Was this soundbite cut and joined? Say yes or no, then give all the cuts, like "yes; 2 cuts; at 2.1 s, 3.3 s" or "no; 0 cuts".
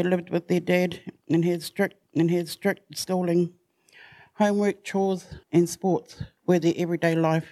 yes; 3 cuts; at 2.0 s, 5.4 s, 6.4 s